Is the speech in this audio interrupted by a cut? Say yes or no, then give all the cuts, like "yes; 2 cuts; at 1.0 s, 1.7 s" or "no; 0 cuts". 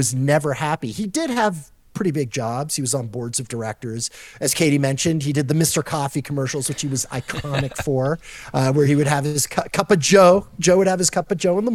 no; 0 cuts